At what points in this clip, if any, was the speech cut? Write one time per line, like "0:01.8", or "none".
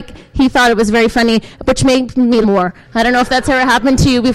0:02.4